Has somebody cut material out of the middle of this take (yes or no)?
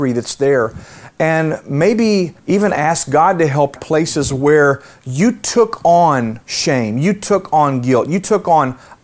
yes